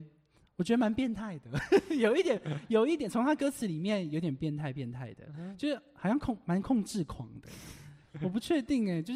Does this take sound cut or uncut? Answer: uncut